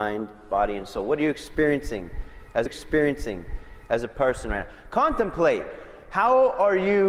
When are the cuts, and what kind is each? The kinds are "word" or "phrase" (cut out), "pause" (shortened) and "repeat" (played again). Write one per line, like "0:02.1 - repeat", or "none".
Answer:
0:02.7 - repeat